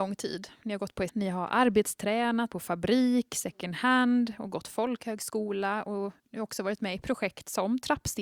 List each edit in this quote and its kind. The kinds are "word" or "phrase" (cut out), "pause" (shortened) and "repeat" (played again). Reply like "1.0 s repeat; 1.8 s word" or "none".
1.1 s word; 2.5 s word; 6.2 s pause